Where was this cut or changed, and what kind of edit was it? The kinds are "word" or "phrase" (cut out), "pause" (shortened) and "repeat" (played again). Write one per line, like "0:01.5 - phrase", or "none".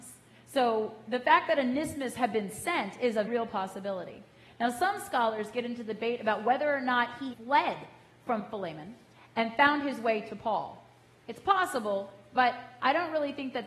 0:03.3 - word
0:07.3 - word